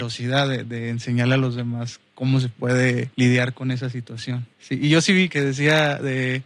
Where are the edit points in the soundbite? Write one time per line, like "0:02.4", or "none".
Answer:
0:03.1
0:04.5
0:05.3